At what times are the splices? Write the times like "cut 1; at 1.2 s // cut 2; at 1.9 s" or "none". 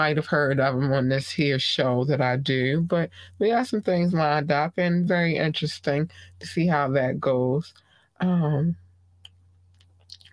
none